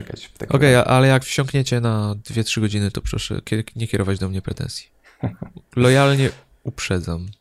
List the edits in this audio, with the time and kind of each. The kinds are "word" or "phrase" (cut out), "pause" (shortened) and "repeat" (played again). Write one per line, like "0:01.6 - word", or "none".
0:01.2 - word

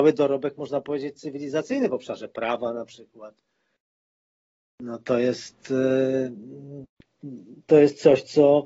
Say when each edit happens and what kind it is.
none

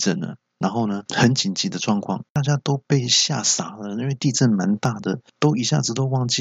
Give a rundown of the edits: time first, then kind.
0:01.1 - pause
0:02.3 - pause
0:05.3 - pause

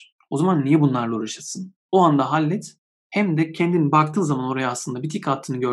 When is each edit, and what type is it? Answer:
none

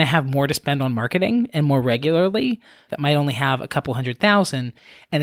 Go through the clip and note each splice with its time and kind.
0:02.9 - phrase

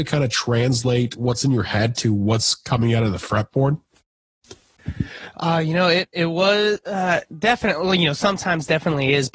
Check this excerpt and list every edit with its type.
none

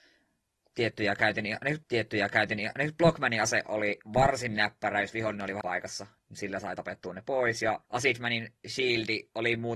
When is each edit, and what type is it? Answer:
0:01.8 - repeat
0:05.6 - word
0:07.8 - pause

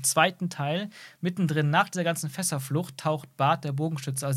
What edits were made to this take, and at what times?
none

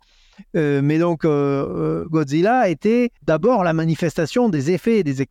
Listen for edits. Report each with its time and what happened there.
0:03.2 - pause

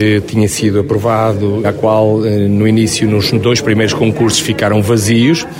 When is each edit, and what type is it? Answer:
0:01.6 - word

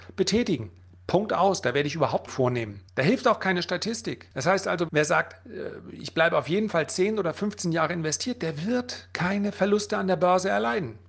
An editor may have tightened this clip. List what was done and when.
0:02.3 - phrase
0:02.9 - pause
0:04.3 - pause
0:04.9 - word

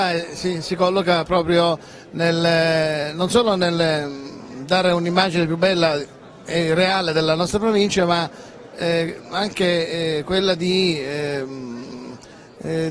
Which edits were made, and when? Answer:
none

